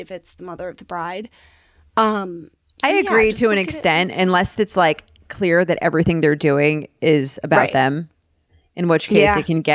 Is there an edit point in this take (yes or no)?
no